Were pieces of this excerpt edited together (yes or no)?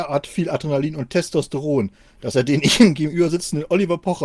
no